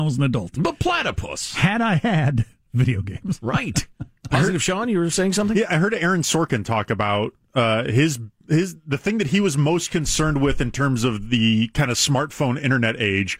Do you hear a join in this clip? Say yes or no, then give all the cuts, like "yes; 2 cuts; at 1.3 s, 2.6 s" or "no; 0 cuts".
no; 0 cuts